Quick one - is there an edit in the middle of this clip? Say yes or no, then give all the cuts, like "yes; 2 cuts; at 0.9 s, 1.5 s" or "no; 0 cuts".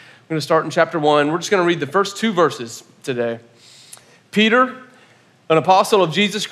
no; 0 cuts